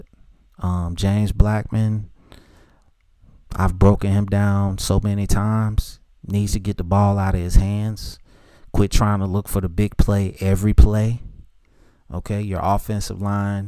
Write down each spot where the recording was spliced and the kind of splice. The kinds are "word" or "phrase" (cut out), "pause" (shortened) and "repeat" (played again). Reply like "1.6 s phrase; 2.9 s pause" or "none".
none